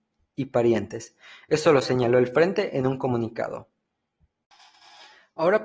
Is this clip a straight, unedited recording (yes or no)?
yes